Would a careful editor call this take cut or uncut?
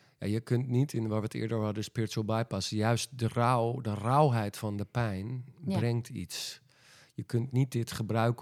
uncut